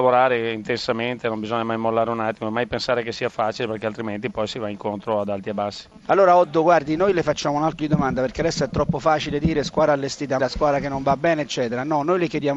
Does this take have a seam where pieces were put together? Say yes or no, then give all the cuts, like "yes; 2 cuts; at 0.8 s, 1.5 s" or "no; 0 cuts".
yes; 2 cuts; at 7.8 s, 10.4 s